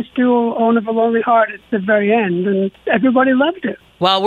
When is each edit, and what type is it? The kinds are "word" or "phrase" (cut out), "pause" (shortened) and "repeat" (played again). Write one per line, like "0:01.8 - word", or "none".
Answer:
0:02.8 - pause